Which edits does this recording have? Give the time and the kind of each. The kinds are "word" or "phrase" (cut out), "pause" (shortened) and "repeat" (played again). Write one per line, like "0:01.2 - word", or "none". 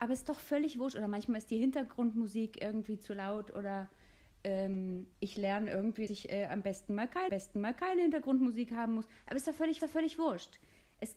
0:05.1 - pause
0:06.1 - word
0:07.3 - repeat
0:09.8 - repeat